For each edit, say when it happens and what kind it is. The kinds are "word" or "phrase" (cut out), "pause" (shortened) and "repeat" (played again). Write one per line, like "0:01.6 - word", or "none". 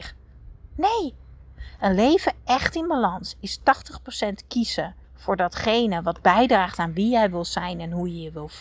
0:05.0 - pause